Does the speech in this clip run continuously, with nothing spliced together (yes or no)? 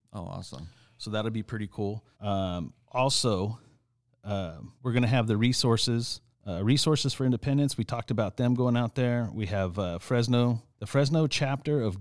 no